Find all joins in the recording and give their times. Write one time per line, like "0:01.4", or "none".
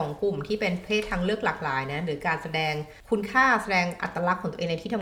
0:03.0